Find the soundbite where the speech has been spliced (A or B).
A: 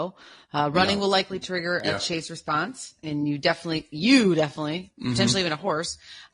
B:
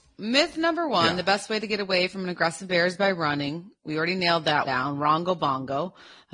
B